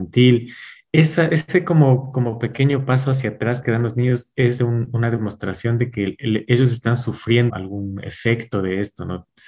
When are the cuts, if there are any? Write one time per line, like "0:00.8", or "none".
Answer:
0:04.6
0:07.5